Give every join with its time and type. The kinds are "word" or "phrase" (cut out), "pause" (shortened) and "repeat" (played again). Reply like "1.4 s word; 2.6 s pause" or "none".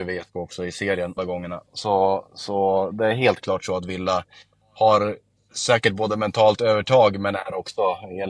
1.2 s word